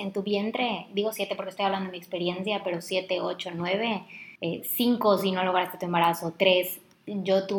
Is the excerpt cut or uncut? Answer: uncut